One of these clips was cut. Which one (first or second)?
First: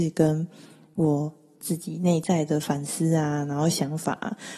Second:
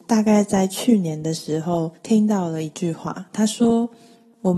second